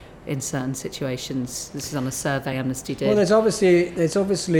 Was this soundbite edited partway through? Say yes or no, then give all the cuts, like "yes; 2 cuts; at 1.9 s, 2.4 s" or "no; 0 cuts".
no; 0 cuts